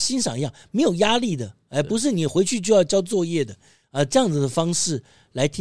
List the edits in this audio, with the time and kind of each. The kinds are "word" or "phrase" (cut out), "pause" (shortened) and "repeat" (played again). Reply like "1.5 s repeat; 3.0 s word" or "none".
none